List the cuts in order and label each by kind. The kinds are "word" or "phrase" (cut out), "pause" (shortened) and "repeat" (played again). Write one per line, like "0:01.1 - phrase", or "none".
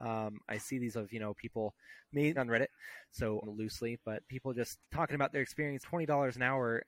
0:00.9 - word
0:02.4 - word
0:03.4 - phrase
0:04.8 - pause
0:05.8 - phrase